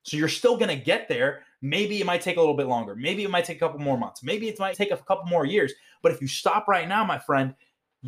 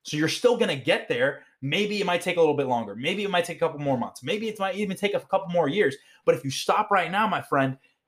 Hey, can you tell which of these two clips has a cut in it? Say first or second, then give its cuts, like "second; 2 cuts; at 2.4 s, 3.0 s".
first; 1 cut; at 4.7 s